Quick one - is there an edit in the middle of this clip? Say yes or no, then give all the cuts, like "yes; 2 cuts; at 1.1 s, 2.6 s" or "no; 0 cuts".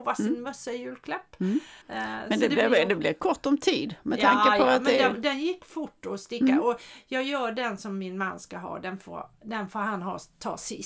yes; 1 cut; at 1.8 s